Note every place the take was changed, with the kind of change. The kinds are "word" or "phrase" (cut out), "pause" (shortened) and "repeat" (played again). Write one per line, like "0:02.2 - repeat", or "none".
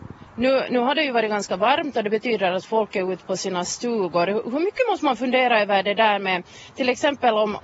none

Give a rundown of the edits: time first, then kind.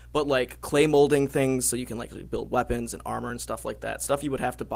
none

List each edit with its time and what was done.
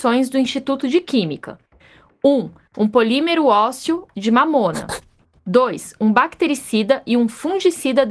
none

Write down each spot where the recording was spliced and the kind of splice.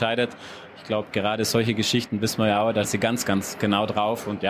0:02.8 - word

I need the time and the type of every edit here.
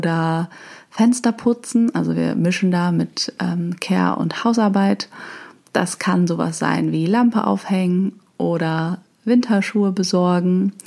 none

